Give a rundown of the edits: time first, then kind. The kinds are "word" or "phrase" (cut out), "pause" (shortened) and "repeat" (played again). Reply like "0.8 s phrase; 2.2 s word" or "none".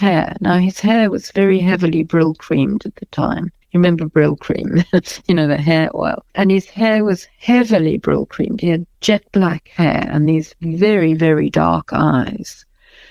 3.6 s pause; 6.3 s pause; 8.9 s pause